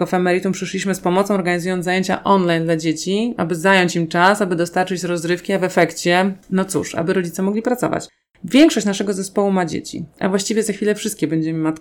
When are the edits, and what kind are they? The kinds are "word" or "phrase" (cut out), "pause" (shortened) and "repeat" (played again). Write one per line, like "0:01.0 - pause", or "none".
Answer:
0:06.4 - pause